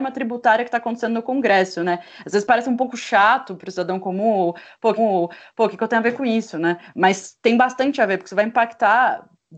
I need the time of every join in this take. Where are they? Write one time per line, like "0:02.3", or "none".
0:05.0